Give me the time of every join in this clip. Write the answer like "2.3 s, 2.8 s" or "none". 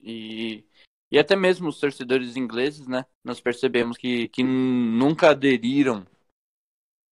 3.1 s